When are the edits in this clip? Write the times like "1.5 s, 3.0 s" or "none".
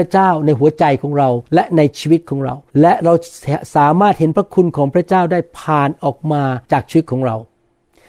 1.4 s, 2.7 s, 6.6 s